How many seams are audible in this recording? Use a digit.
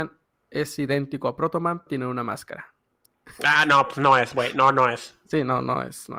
1